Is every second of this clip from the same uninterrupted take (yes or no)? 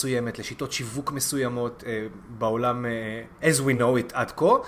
yes